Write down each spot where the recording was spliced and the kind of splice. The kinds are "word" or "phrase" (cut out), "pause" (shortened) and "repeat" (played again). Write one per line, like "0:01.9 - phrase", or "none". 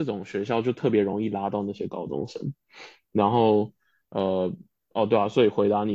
none